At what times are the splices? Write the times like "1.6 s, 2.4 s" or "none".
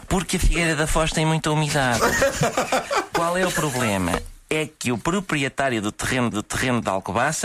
6.3 s